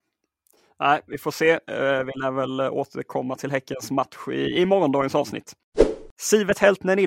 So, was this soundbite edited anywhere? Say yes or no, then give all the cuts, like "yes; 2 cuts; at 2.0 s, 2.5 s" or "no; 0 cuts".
yes; 1 cut; at 6.1 s